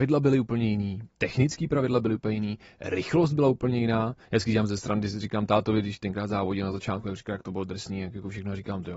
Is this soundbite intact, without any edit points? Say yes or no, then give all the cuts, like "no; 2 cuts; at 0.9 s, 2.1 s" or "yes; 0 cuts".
yes; 0 cuts